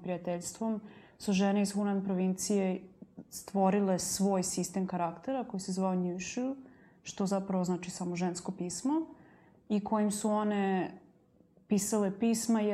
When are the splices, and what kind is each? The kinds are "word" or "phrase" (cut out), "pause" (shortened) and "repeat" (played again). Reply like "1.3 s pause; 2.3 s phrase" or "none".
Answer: none